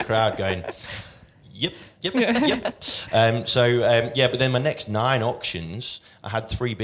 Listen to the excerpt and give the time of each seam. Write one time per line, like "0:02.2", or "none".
none